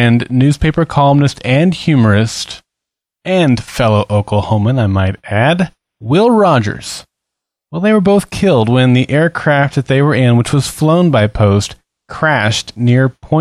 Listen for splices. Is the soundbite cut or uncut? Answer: uncut